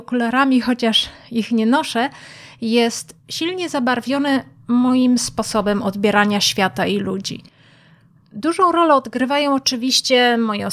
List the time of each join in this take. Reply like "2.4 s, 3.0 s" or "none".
none